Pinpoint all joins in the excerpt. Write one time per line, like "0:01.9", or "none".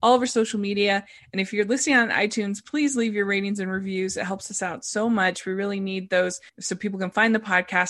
0:06.5